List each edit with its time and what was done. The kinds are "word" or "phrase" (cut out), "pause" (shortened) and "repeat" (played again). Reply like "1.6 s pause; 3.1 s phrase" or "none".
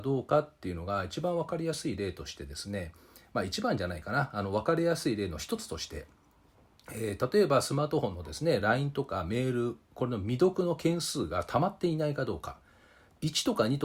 none